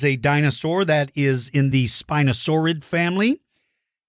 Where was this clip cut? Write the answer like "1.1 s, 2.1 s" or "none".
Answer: none